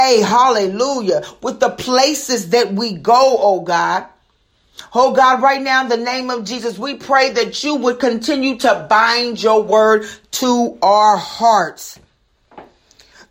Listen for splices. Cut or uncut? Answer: uncut